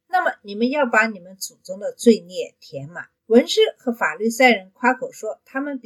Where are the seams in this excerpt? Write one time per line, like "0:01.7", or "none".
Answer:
0:03.2